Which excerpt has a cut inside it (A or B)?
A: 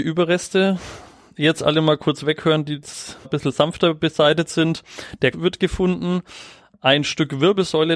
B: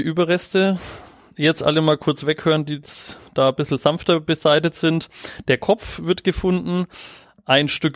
A